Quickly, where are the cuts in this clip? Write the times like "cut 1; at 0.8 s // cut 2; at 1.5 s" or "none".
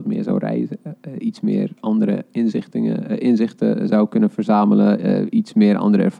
none